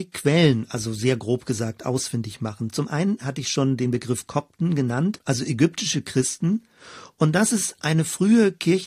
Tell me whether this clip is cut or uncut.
uncut